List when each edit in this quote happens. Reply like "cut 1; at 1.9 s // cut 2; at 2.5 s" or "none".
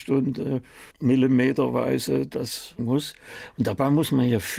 cut 1; at 0.9 s // cut 2; at 2.8 s